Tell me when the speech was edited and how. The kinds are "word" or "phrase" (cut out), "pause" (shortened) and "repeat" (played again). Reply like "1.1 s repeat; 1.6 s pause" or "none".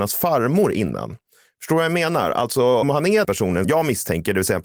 2.8 s word; 3.2 s word; 3.6 s word